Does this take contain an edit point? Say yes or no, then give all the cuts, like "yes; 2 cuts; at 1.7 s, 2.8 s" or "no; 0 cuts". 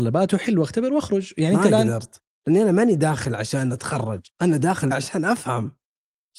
yes; 2 cuts; at 4.3 s, 4.9 s